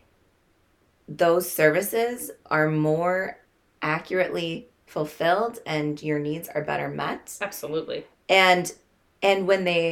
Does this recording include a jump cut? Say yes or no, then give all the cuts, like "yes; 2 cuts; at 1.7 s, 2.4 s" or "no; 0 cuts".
no; 0 cuts